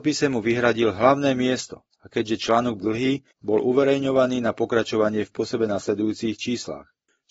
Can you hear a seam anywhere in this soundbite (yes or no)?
yes